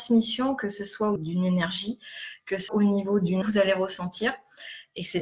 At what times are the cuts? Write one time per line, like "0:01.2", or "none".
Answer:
0:01.2
0:02.7
0:03.4